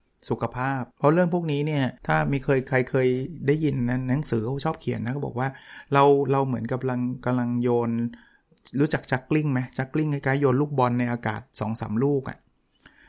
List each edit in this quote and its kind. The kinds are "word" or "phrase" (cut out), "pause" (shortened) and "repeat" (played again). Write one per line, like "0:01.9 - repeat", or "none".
0:00.9 - pause
0:02.0 - pause